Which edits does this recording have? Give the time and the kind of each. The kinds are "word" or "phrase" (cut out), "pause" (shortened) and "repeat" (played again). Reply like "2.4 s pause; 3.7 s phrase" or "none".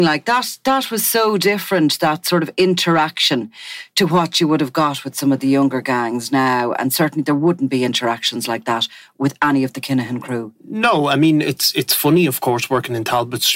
none